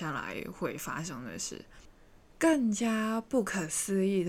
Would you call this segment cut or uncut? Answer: uncut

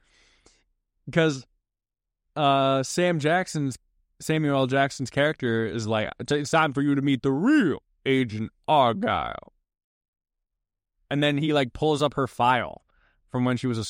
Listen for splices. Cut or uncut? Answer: cut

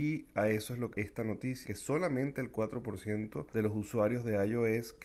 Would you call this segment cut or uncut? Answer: cut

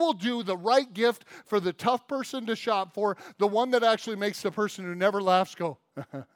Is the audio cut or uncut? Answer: uncut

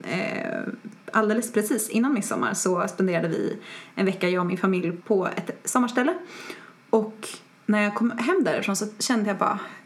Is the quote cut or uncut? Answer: uncut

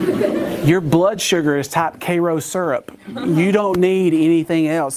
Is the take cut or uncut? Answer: uncut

